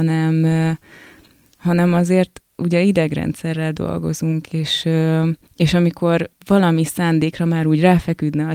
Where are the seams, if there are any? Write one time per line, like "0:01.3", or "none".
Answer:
0:05.4